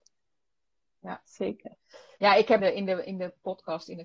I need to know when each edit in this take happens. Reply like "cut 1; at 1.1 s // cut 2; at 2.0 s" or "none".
cut 1; at 2.2 s // cut 2; at 2.6 s